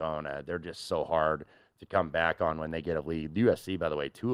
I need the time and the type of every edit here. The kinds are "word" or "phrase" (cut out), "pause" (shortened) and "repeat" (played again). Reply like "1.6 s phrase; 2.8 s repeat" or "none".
none